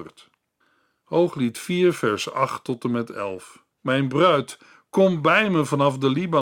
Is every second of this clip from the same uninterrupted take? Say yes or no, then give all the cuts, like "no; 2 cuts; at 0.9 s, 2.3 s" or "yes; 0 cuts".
no; 1 cut; at 3.7 s